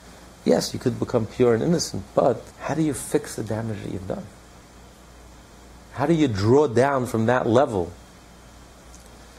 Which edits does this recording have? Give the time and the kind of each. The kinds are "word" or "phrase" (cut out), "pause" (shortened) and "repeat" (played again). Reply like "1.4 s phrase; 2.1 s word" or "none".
2.5 s pause; 4.6 s pause